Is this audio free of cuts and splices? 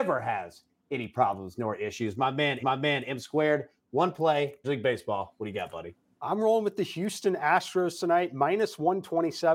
no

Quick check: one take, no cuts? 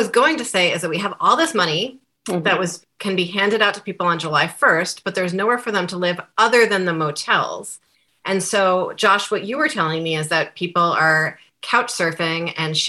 yes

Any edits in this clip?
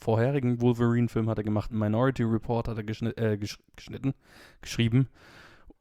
no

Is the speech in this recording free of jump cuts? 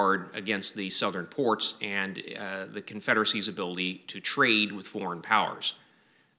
yes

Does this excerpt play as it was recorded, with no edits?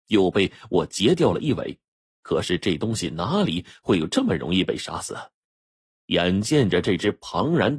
yes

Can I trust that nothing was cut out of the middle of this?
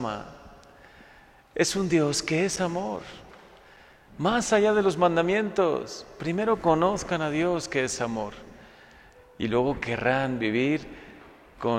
yes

